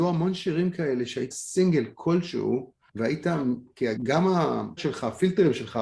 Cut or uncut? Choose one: cut